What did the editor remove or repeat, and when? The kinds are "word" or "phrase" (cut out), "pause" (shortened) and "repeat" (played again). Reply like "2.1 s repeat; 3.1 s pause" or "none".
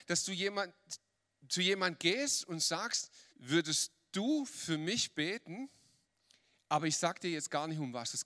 3.3 s pause